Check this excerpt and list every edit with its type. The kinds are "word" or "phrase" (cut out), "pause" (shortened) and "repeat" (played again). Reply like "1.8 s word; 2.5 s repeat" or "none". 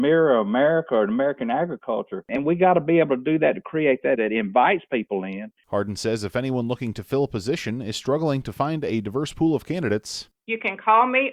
4.1 s word